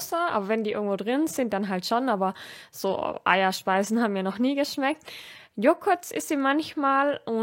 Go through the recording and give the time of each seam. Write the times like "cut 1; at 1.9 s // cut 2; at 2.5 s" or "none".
none